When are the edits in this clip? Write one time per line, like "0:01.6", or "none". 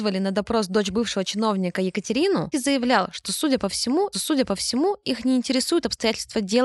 0:02.5
0:04.1